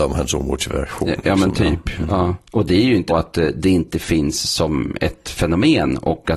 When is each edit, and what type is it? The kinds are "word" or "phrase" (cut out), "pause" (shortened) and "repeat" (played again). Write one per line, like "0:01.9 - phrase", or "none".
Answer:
0:02.5 - pause
0:03.1 - word